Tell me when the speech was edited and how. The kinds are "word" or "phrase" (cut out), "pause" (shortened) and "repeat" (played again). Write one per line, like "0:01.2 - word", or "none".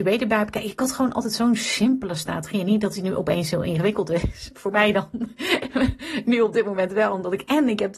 none